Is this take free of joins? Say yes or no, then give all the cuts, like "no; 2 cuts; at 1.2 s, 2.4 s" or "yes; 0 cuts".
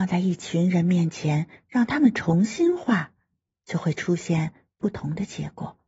yes; 0 cuts